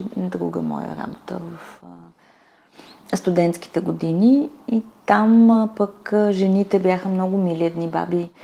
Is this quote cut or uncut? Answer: uncut